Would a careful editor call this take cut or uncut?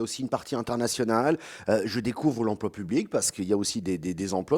uncut